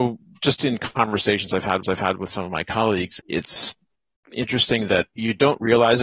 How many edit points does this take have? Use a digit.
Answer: 3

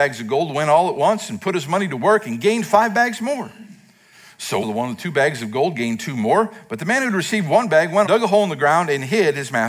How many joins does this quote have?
2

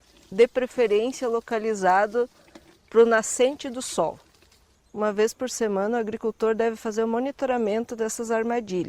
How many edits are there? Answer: 0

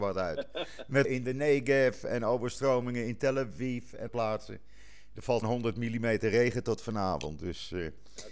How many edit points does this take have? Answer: 3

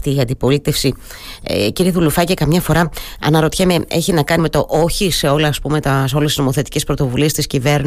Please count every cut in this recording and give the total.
1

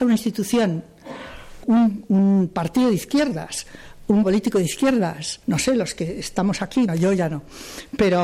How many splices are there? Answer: 4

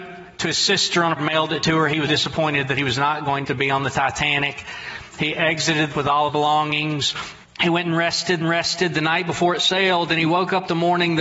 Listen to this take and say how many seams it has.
7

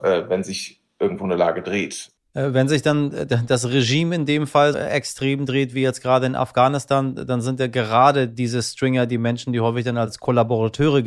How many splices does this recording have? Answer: 1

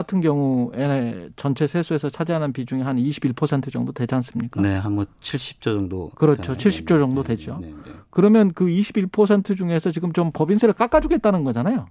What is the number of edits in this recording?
1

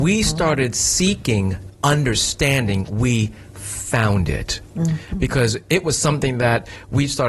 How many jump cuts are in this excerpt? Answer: 0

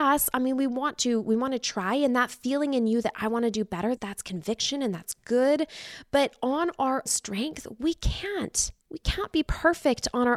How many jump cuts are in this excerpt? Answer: 3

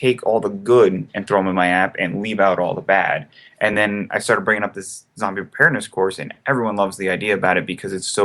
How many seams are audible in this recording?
0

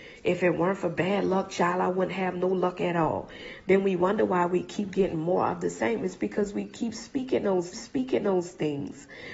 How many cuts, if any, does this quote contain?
1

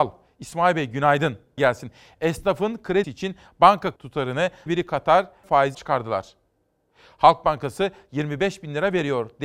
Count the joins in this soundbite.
6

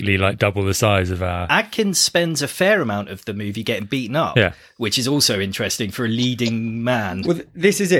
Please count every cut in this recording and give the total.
0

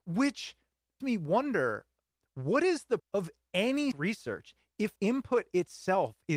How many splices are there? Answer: 4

